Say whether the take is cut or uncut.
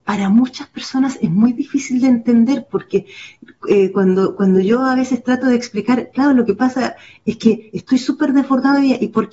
uncut